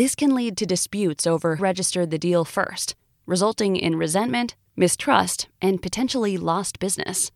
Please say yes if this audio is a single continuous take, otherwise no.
no